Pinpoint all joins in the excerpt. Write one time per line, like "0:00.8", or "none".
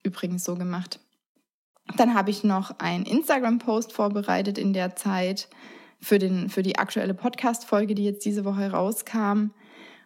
none